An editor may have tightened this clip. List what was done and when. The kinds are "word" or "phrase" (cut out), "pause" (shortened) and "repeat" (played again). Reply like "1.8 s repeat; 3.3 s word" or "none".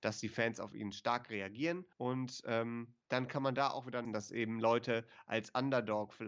1.9 s pause; 3.0 s pause; 4.0 s phrase